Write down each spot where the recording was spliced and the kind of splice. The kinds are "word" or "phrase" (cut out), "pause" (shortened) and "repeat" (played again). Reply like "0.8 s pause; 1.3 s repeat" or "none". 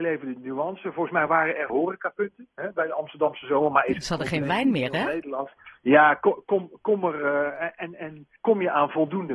1.7 s word; 8.4 s pause